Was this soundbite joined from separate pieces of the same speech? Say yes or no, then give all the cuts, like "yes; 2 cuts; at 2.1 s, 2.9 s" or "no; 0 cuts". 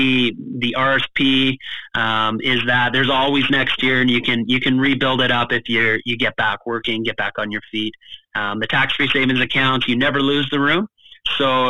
no; 0 cuts